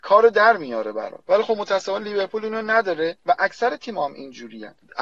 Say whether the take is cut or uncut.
uncut